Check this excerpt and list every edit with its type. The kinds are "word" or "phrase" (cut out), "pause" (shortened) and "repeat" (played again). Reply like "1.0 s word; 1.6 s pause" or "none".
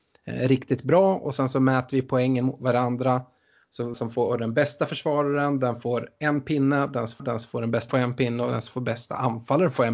3.9 s word; 7.2 s repeat; 7.9 s word

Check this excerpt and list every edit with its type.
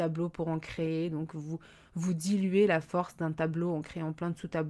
none

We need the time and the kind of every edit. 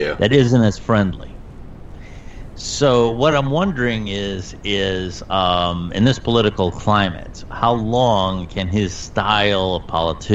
none

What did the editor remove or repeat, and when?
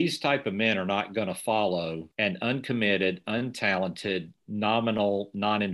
2.1 s pause

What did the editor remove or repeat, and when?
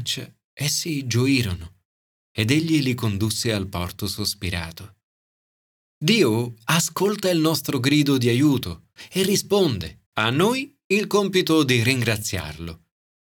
10.1 s pause

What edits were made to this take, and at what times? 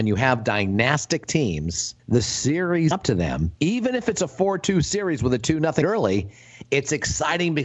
2.0 s pause; 2.9 s word; 3.6 s pause; 5.8 s word

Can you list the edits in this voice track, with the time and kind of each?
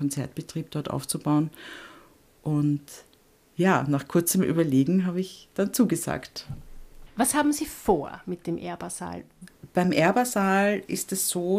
none

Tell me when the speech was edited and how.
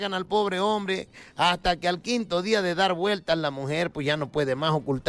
none

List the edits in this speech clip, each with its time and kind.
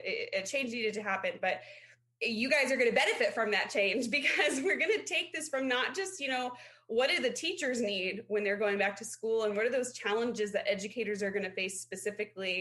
none

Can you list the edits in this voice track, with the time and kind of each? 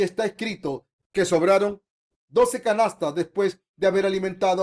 none

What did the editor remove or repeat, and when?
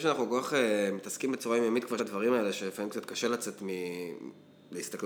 2.0 s word

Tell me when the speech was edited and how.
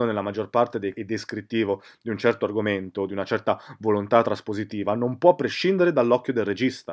0.9 s phrase

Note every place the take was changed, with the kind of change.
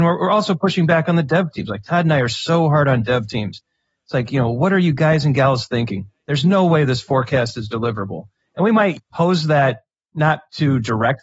none

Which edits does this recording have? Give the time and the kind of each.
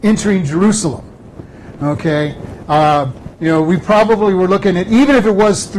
3.3 s pause

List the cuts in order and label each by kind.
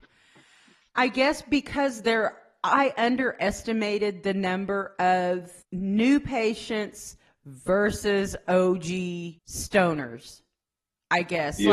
5.6 s pause; 9.4 s pause

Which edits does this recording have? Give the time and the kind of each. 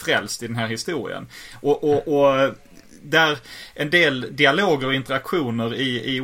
none

